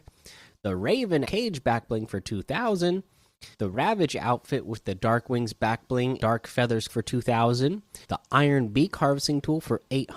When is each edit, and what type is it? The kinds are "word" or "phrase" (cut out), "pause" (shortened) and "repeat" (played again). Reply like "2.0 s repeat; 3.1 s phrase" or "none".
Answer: 1.2 s phrase; 3.5 s pause; 6.2 s word; 6.9 s word; 8.0 s pause